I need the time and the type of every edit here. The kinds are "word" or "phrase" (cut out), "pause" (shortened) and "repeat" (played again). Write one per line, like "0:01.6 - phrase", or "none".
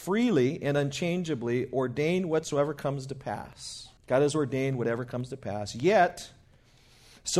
0:04.0 - pause